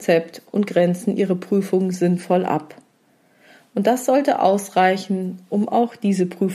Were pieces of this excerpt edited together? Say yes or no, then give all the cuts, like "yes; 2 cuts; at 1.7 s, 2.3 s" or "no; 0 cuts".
no; 0 cuts